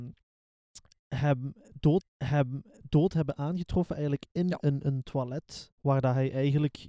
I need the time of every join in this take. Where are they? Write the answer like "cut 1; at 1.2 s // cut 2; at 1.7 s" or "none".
cut 1; at 2.0 s // cut 2; at 5.8 s